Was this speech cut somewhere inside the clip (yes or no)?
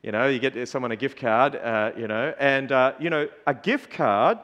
no